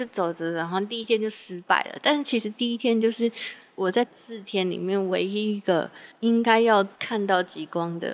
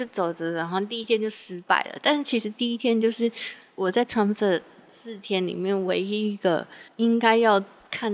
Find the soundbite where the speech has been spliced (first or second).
first